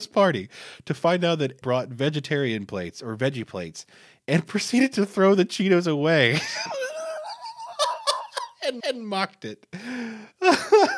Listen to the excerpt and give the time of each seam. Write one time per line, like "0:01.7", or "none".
0:01.6
0:08.8